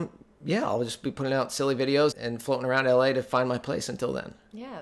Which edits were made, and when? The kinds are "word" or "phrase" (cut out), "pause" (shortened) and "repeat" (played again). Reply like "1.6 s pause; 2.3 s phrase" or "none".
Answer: 2.1 s word